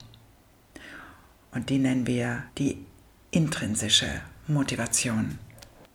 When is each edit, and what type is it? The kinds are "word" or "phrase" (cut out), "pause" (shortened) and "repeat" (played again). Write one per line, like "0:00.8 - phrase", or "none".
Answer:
0:02.5 - pause